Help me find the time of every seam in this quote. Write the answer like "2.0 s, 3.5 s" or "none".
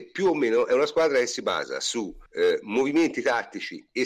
2.3 s